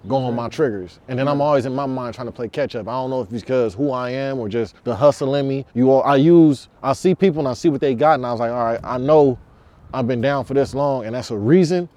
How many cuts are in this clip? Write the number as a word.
three